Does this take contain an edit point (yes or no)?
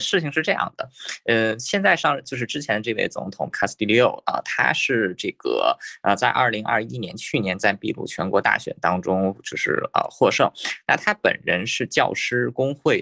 yes